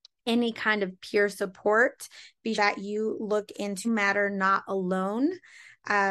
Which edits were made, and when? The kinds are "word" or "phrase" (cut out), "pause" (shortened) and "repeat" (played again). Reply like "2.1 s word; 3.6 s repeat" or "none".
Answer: 2.5 s word; 3.8 s word